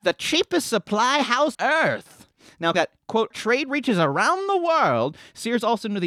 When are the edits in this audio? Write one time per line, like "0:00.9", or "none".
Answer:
0:01.5
0:02.7
0:03.3